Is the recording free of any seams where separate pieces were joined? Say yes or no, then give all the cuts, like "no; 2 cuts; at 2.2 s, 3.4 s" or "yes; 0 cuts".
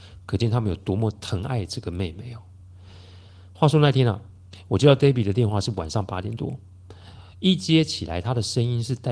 yes; 0 cuts